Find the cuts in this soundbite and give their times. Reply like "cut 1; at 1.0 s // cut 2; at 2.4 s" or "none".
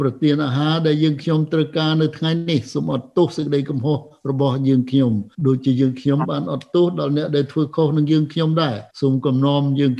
cut 1; at 5.3 s // cut 2; at 8.9 s